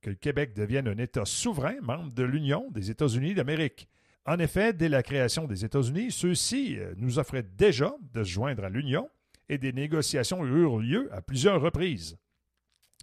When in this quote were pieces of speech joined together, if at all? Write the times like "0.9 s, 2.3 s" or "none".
4.1 s